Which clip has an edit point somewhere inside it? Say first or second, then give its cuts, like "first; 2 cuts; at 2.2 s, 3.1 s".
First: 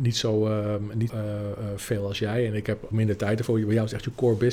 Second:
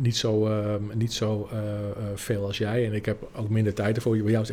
first; 2 cuts; at 1.1 s, 2.9 s